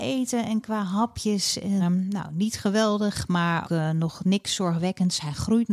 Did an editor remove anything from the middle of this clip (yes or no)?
yes